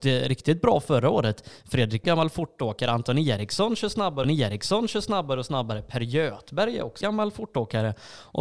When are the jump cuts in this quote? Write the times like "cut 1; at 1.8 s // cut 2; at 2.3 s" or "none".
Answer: cut 1; at 2.0 s // cut 2; at 4.2 s // cut 3; at 7.0 s